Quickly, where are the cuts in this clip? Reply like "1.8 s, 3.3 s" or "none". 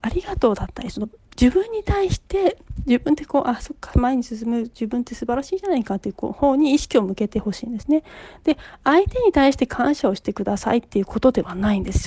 none

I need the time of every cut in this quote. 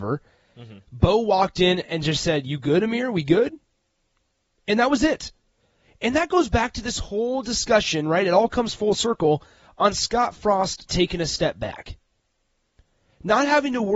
none

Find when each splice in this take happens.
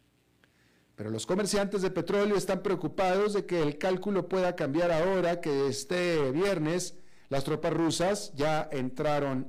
none

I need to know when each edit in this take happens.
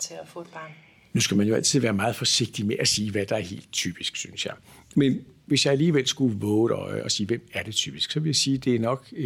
none

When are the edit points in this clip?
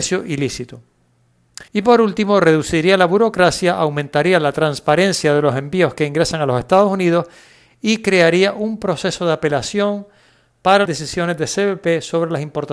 1.7 s, 10.9 s

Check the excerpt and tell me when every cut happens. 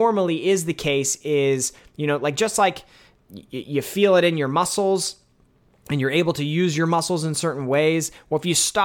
none

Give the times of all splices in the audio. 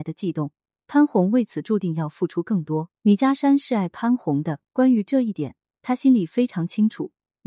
3.0 s

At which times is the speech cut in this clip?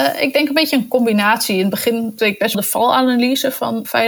2.2 s, 2.5 s

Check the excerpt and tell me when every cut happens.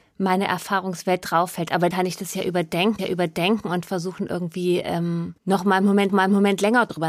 1.9 s, 3.0 s, 5.4 s, 6.1 s

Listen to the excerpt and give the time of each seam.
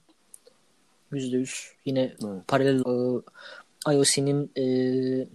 2.8 s

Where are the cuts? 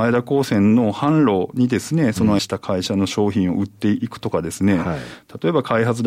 2.4 s

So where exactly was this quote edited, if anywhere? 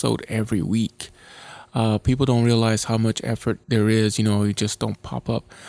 3.6 s

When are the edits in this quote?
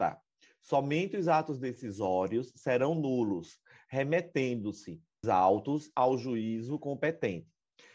5.2 s

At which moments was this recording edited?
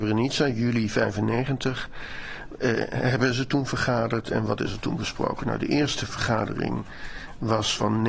none

